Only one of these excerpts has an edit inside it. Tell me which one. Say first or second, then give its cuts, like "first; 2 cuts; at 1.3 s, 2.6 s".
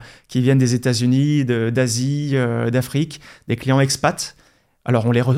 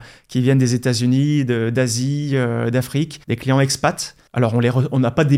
second; 2 cuts; at 3.2 s, 4.3 s